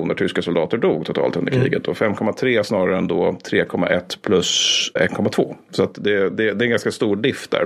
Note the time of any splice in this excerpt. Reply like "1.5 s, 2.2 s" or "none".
none